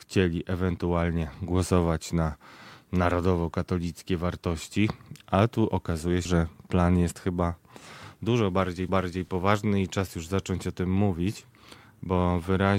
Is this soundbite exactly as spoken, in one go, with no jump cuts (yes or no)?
no